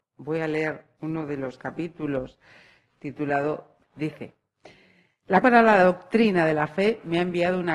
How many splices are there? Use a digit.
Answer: 2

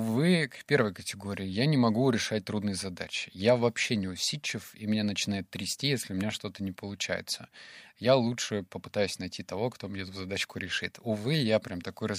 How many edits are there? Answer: 0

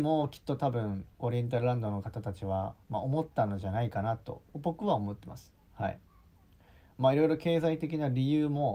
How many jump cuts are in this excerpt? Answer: 2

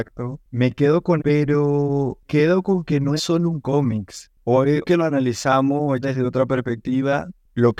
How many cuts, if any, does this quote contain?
5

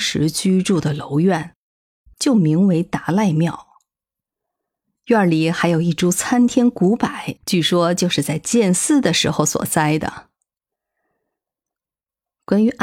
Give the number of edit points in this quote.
1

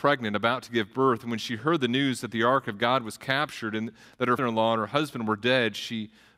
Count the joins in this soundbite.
1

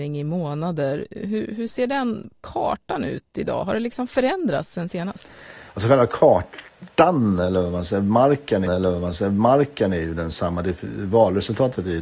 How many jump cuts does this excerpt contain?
3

